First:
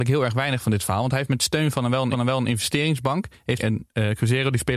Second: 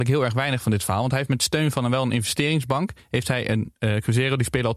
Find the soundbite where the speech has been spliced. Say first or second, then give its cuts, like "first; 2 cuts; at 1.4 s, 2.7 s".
first; 2 cuts; at 2.1 s, 3.6 s